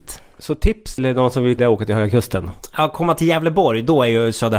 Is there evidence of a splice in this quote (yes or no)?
yes